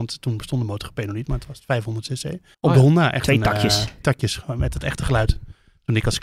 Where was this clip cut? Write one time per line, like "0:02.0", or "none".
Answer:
0:02.5
0:04.0